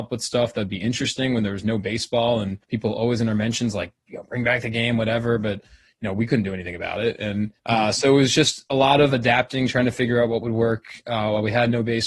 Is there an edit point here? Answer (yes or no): yes